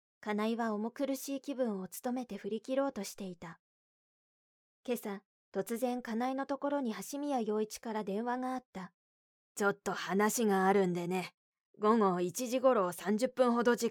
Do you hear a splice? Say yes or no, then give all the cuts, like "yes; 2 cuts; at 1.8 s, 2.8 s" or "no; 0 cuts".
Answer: no; 0 cuts